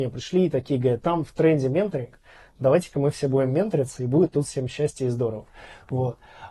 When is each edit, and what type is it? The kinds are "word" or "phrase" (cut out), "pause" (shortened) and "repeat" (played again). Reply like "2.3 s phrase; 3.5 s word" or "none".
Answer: 1.0 s word